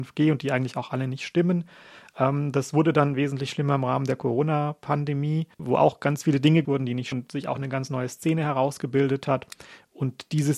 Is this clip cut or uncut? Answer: cut